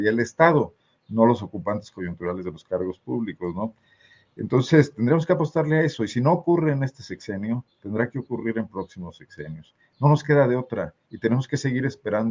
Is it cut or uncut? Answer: uncut